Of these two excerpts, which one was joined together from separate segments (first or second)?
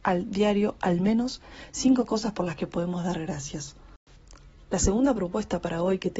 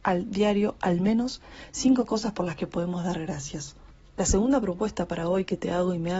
second